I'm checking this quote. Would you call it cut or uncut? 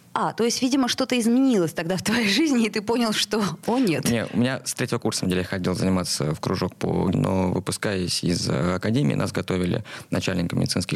cut